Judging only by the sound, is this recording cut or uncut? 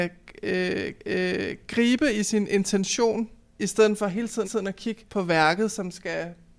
cut